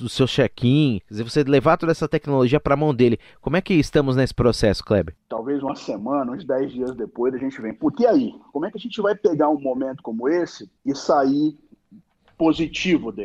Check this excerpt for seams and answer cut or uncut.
cut